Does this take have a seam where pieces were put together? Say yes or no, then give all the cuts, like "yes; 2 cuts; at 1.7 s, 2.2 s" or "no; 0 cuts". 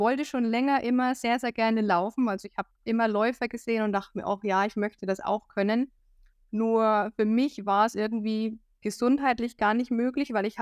no; 0 cuts